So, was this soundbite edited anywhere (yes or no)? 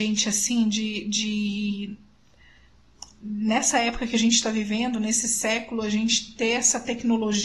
no